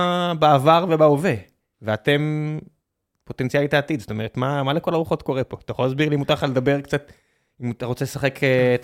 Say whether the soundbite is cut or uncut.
uncut